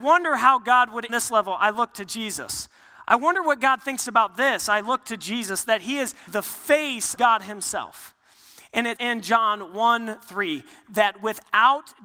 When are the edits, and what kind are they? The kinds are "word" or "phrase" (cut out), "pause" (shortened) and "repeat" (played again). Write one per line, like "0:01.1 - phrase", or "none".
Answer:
0:01.1 - phrase
0:06.3 - word
0:07.2 - word
0:09.0 - word